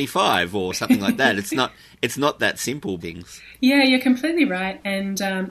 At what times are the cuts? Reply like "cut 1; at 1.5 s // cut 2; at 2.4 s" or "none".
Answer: cut 1; at 3.0 s